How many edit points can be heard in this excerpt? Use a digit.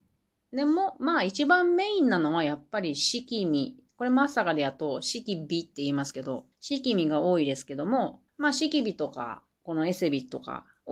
2